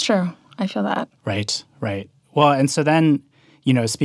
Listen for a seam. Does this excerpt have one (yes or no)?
yes